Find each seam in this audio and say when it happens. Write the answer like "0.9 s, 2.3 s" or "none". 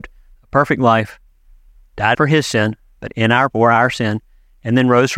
2.1 s, 3.5 s